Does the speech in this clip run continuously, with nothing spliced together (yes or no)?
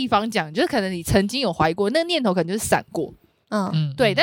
yes